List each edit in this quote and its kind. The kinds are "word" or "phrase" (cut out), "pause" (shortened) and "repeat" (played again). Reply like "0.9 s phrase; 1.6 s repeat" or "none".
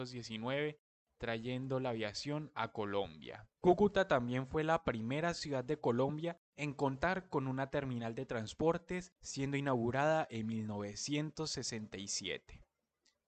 3.5 s pause; 6.5 s pause; 9.2 s pause